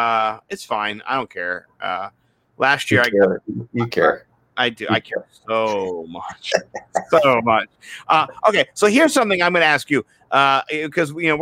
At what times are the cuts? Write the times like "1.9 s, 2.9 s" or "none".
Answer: none